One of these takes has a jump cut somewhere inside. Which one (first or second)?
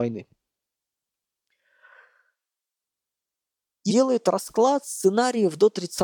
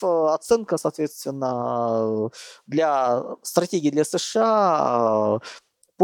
first